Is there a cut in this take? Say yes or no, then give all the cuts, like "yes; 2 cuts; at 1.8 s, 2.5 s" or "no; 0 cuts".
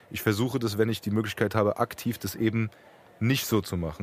no; 0 cuts